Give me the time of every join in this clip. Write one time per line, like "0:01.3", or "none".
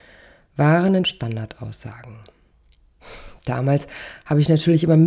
0:01.0